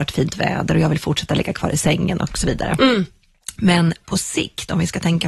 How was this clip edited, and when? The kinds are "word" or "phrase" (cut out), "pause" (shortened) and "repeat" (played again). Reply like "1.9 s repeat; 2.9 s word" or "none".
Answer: none